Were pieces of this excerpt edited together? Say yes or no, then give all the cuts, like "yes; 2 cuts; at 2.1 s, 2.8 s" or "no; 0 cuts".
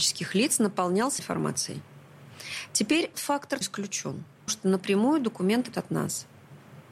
yes; 5 cuts; at 1.2 s, 3.1 s, 3.6 s, 4.5 s, 5.7 s